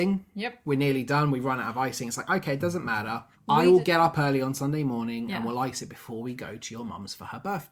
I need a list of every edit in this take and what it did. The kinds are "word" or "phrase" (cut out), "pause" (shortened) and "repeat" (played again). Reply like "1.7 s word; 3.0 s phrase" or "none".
3.3 s pause